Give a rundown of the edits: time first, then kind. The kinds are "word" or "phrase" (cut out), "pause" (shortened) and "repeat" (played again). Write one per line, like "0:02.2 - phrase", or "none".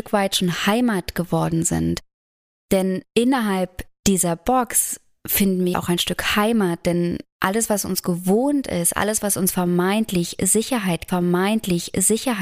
0:05.7 - word
0:11.1 - repeat